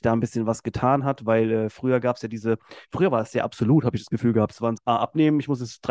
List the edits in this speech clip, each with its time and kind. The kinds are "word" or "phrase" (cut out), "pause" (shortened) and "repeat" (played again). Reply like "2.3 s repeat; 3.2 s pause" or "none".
4.8 s word